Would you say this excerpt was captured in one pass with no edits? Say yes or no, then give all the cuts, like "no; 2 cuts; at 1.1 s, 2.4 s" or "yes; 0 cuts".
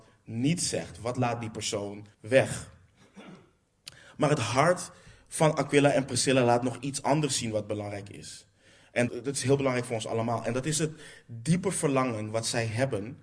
no; 2 cuts; at 2.1 s, 9.1 s